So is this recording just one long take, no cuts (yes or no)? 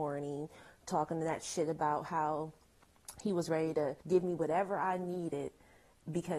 no